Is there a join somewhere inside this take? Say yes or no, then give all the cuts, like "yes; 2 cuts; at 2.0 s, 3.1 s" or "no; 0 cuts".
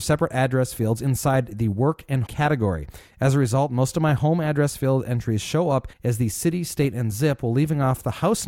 yes; 2 cuts; at 2.3 s, 5.9 s